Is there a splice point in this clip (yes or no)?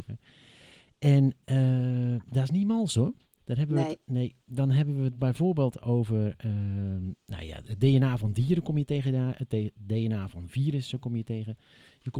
yes